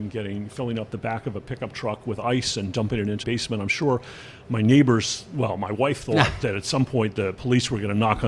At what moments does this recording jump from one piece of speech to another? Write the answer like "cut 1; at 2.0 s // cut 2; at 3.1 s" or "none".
cut 1; at 3.2 s